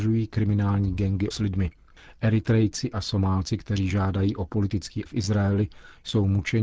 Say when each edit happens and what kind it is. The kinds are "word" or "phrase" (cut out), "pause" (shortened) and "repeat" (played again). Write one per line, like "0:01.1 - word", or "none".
0:01.3 - word
0:02.9 - word
0:05.1 - word

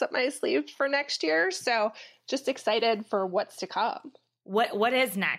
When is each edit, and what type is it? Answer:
none

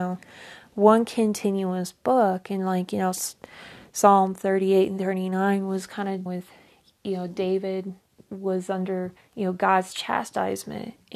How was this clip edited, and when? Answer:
0:06.3 - word
0:08.1 - pause
0:09.2 - pause

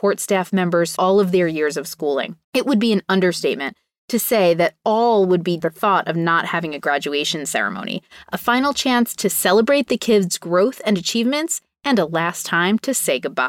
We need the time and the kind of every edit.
0:00.9 - word
0:02.4 - pause
0:05.6 - phrase

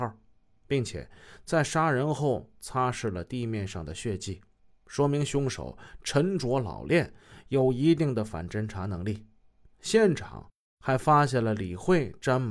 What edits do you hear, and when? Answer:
none

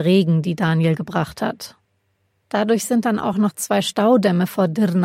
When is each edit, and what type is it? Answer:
none

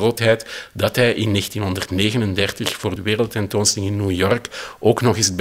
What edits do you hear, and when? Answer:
0:03.0 - word

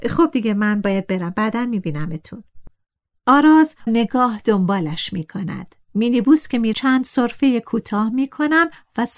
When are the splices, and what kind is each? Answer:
0:03.9 - word
0:06.7 - word

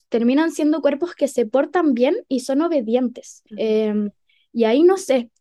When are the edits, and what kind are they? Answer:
0:03.5 - pause

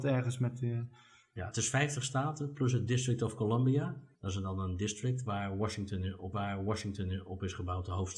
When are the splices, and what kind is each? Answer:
0:04.1 - pause
0:06.3 - repeat

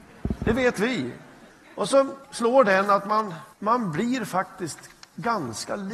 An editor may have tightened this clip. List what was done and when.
0:01.5 - pause
0:02.2 - pause
0:03.5 - pause

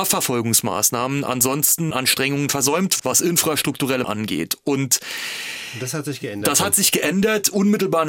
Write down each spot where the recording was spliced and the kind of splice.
0:01.9 - word
0:03.0 - word
0:04.0 - word

